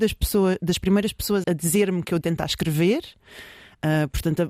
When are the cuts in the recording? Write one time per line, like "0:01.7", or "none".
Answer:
0:01.4
0:02.2